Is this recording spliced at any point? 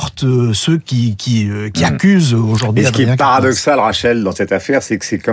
no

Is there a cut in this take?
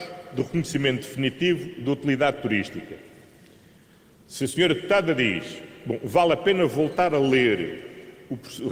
no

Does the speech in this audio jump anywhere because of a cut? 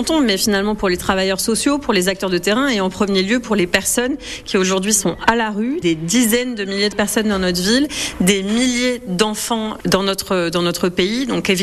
no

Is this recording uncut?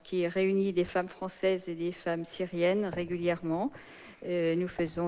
yes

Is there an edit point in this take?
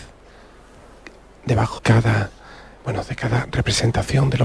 yes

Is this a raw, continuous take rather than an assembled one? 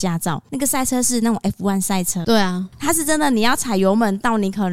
no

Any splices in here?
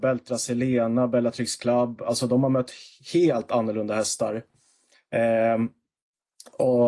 no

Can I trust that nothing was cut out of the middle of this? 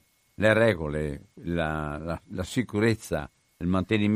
yes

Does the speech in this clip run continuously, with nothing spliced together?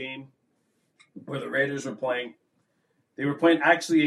yes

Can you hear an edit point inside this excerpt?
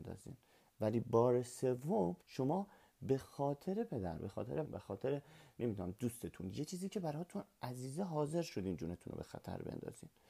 yes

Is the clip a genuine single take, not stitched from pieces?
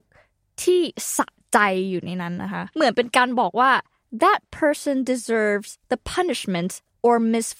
yes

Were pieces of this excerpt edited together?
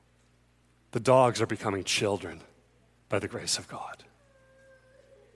no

